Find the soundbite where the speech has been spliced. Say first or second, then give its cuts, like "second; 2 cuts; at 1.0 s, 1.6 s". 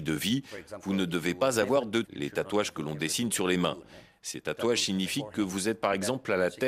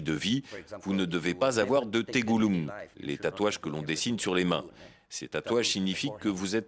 first; 1 cut; at 2.0 s